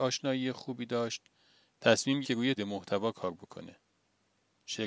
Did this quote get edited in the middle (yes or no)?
yes